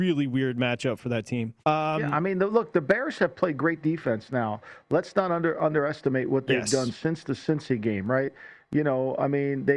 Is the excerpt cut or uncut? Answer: cut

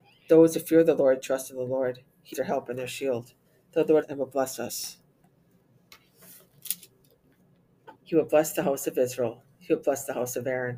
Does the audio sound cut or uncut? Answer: cut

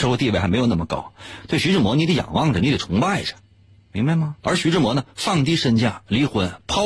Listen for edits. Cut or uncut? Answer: cut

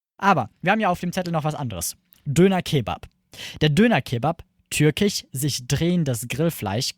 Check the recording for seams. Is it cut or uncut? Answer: uncut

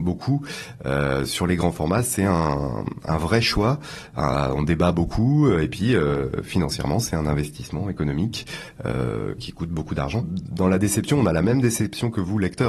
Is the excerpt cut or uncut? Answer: uncut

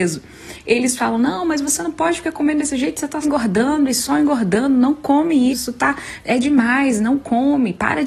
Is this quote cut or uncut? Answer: cut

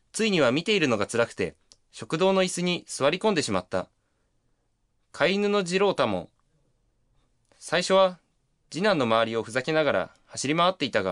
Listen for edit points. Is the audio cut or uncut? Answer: uncut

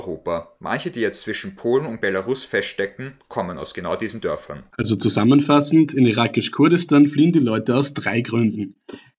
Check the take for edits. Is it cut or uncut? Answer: cut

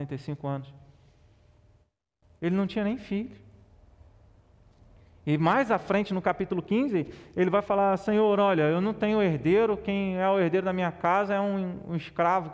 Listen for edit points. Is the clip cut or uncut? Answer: uncut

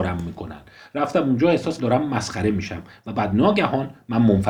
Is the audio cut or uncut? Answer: cut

